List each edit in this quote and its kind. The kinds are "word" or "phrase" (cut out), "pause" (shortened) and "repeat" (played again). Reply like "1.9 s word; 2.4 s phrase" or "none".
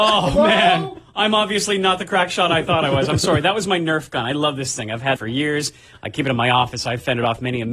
5.2 s word